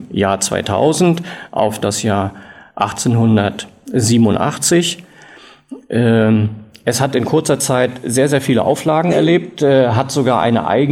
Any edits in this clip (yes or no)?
no